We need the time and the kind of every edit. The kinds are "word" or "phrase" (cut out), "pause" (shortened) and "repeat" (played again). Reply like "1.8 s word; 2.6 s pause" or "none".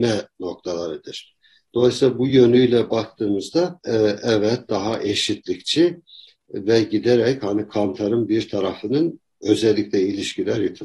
none